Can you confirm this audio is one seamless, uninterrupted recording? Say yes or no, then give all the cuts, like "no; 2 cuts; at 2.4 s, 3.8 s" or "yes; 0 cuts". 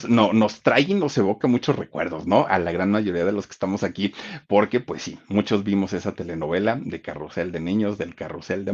yes; 0 cuts